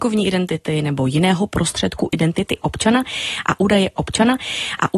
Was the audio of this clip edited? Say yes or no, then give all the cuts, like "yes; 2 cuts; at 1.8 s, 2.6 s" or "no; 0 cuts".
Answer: yes; 1 cut; at 3.9 s